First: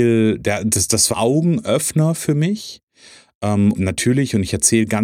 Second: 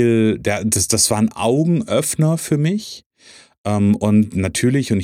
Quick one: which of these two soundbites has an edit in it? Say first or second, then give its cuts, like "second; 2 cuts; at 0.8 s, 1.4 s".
first; 2 cuts; at 1.1 s, 3.7 s